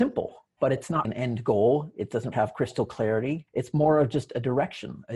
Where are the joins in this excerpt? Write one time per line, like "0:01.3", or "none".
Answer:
0:01.0
0:02.3
0:03.5